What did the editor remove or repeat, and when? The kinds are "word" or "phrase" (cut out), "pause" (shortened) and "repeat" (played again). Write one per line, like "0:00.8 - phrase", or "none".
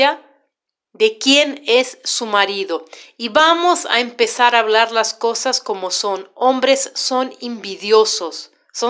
none